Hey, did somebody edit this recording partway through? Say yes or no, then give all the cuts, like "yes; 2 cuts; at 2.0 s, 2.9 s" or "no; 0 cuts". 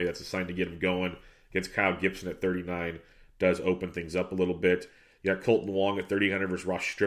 no; 0 cuts